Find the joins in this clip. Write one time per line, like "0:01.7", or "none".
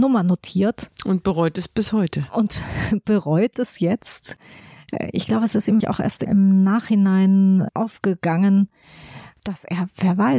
0:05.8
0:07.7

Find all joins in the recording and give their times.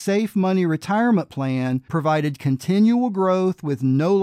0:01.9

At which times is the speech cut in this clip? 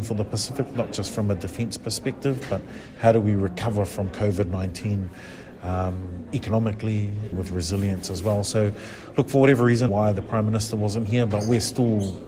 0:07.3
0:09.9

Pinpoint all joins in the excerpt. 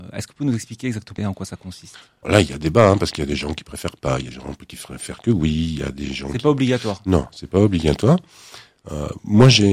0:01.2
0:02.2
0:04.3

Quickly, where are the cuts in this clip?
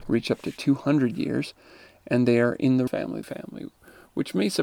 0:02.9
0:03.2

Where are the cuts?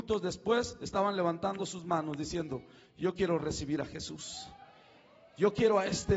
none

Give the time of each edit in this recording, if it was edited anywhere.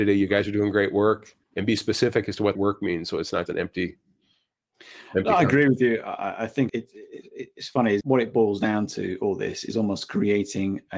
0:01.4
0:02.5
0:03.5
0:06.7
0:08.0

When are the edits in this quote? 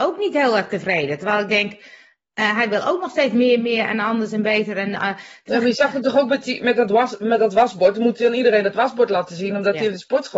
none

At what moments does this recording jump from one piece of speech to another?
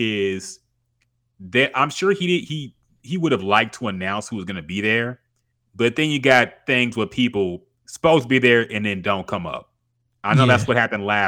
none

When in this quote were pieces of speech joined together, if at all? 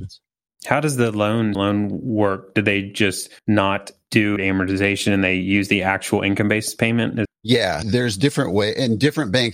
0:01.5
0:03.4
0:04.4
0:07.2
0:07.8

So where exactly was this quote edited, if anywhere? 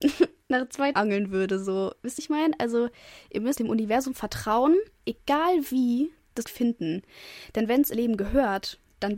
0:00.9
0:02.2
0:03.6
0:05.0
0:06.4
0:07.9

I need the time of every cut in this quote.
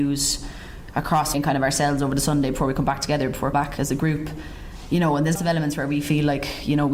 0:01.3
0:03.5
0:05.3

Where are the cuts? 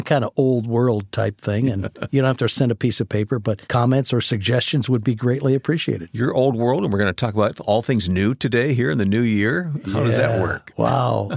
0:03.6

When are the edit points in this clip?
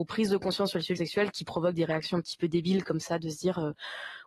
0:01.0
0:01.3
0:02.4

